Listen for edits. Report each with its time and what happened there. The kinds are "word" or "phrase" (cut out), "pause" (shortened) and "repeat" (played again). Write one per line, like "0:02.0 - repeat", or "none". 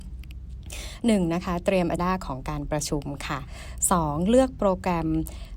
0:02.0 - phrase

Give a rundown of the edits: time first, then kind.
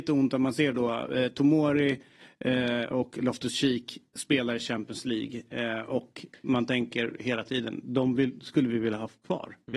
none

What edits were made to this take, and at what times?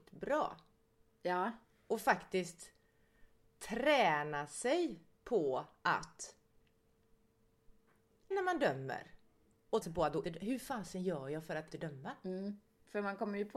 0:08.3 - word
0:09.8 - word
0:10.2 - word
0:11.7 - word

